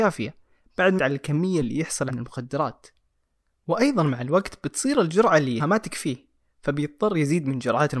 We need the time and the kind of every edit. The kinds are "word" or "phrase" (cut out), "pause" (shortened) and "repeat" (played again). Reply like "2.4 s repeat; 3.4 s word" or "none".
1.0 s word; 1.6 s word; 2.1 s word; 5.6 s word